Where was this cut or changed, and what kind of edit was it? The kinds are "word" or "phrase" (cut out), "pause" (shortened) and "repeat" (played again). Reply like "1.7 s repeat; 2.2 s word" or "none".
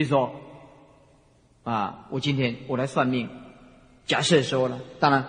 none